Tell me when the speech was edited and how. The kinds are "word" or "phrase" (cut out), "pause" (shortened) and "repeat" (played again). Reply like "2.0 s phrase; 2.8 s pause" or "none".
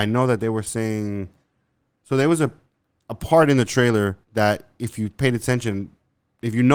4.2 s pause